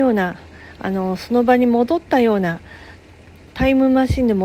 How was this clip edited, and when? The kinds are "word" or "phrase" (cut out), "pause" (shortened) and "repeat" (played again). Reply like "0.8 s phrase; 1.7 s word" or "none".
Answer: none